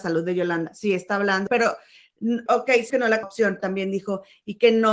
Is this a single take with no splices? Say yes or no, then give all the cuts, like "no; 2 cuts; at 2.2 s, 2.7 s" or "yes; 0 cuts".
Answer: no; 5 cuts; at 1.5 s, 2.5 s, 2.9 s, 3.2 s, 3.6 s